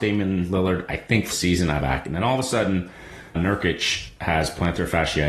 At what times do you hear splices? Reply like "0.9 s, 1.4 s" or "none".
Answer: 1.3 s, 1.8 s, 3.3 s